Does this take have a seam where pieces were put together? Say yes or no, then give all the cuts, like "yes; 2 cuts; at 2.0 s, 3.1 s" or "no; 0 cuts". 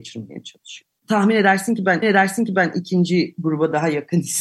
yes; 2 cuts; at 1.0 s, 2.0 s